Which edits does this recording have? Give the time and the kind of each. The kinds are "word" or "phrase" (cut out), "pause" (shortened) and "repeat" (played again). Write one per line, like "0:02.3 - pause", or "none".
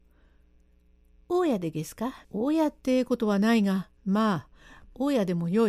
0:02.2 - pause
0:04.0 - pause